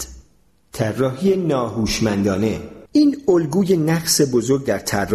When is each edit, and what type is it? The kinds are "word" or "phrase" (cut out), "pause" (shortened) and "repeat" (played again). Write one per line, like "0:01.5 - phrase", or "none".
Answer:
0:02.9 - pause